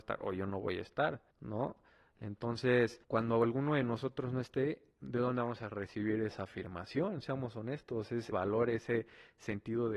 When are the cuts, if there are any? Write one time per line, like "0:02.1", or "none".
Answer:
0:01.3
0:03.0
0:04.9
0:08.3